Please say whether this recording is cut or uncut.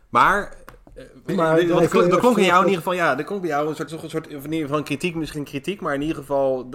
cut